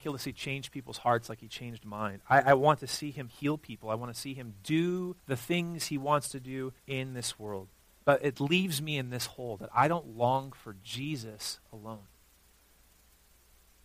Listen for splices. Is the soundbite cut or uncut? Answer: cut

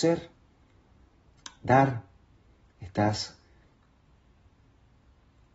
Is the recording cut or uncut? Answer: uncut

